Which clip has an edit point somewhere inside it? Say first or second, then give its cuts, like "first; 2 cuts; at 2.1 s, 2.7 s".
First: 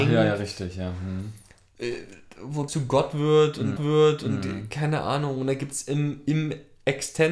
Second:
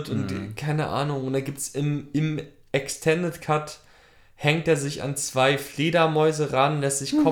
first; 2 cuts; at 2.7 s, 3.8 s